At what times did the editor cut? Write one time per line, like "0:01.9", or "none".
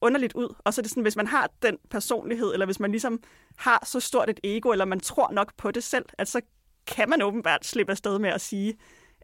none